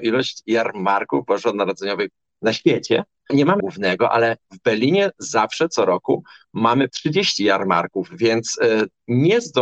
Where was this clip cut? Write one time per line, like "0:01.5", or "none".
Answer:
0:03.3
0:03.6
0:06.9